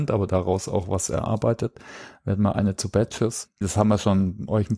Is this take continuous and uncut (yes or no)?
no